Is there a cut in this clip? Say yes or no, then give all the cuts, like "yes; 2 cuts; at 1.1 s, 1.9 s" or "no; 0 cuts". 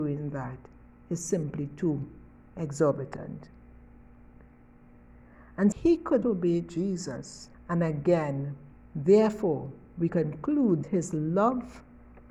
yes; 6 cuts; at 5.7 s, 6.2 s, 7.5 s, 8.7 s, 10.1 s, 10.8 s